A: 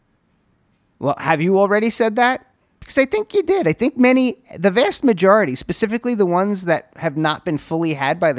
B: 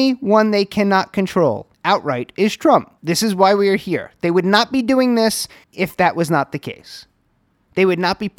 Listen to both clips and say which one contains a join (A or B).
B